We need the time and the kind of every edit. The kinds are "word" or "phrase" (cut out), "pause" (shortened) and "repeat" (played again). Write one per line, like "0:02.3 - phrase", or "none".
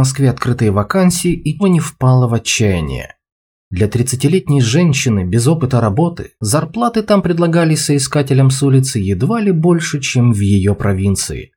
0:01.6 - phrase
0:06.4 - pause